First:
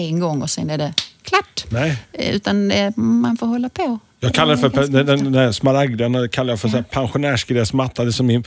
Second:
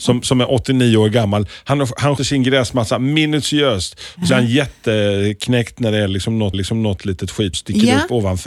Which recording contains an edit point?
second; 4 cuts; at 2.2 s, 4.3 s, 6.5 s, 7.5 s

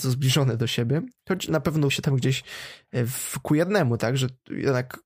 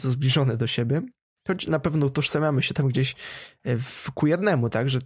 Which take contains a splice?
first; 2 cuts; at 1.2 s, 1.9 s

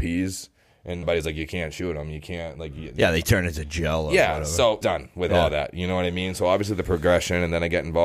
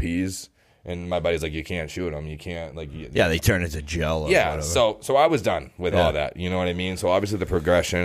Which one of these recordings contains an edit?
first; 2 cuts; at 1.0 s, 4.8 s

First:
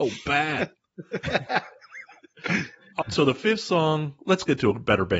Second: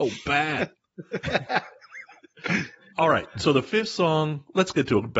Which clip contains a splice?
first; 1 cut; at 3.0 s

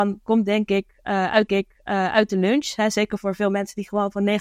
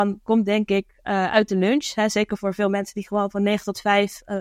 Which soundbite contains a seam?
first; 1 cut; at 1.5 s

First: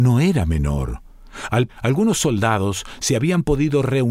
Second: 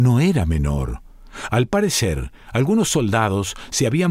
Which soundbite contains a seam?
first; 1 cut; at 1.7 s

